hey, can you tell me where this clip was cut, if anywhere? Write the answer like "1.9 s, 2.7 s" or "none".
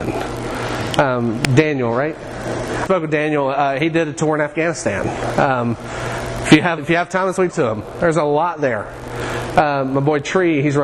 2.9 s, 6.8 s, 7.5 s